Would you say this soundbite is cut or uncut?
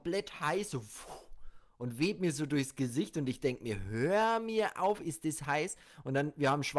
uncut